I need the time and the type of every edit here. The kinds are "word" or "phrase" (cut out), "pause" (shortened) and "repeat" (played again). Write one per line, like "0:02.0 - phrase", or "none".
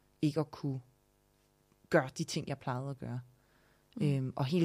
none